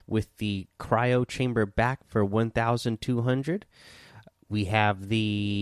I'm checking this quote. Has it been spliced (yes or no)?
yes